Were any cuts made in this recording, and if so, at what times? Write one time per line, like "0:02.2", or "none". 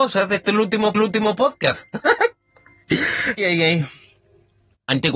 0:00.9
0:03.4